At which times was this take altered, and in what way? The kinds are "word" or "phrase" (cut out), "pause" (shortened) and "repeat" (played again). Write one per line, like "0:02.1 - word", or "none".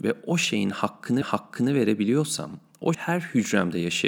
0:01.2 - repeat
0:02.9 - word